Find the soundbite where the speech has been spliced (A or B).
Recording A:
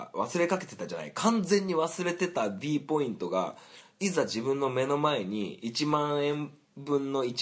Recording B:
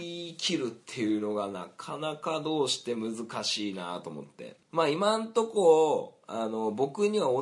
B